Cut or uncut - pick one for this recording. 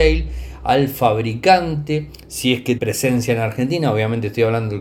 cut